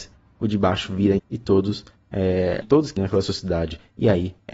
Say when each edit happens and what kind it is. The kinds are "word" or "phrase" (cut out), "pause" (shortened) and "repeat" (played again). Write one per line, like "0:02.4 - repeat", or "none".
0:01.2 - word
0:02.6 - word
0:03.0 - word